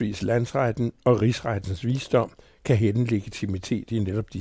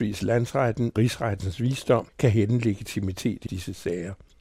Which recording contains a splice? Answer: second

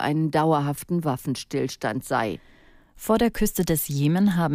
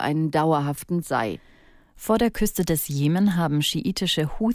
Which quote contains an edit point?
second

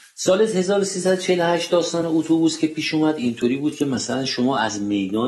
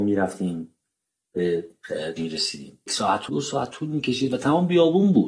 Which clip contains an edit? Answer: second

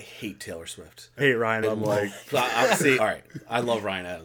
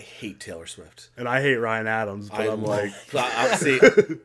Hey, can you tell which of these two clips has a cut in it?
first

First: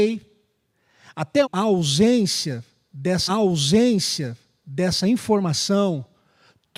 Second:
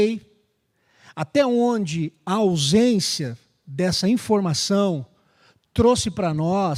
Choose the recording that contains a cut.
first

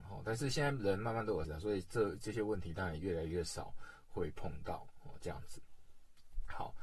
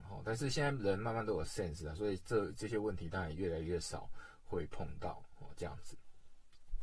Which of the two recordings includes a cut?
first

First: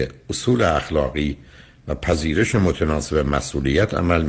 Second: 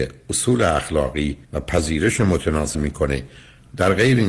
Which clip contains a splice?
second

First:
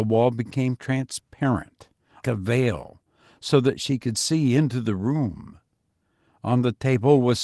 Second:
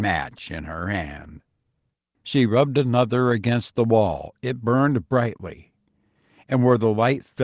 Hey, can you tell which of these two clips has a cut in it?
first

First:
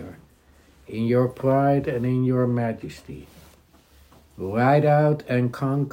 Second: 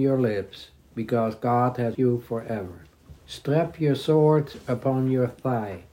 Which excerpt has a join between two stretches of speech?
second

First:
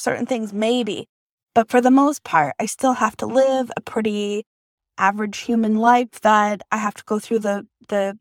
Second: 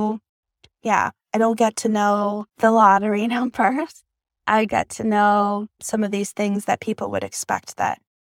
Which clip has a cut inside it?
second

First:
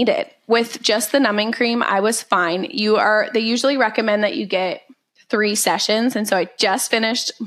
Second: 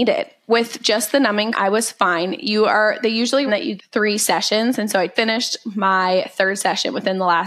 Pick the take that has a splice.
second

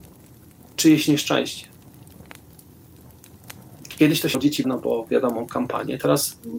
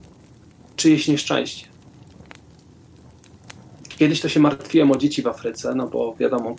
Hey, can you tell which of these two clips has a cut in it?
first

